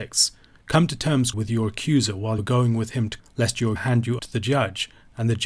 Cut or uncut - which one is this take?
cut